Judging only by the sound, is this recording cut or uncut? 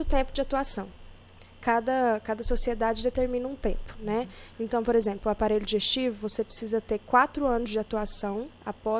uncut